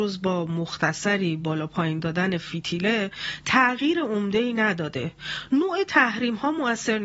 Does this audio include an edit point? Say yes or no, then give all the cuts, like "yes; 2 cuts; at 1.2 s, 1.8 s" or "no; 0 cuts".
no; 0 cuts